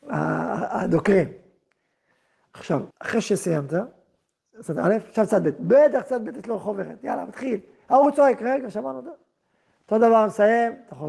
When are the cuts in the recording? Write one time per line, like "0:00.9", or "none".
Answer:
0:02.9